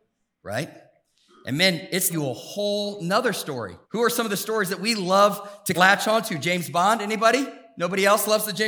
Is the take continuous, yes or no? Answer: no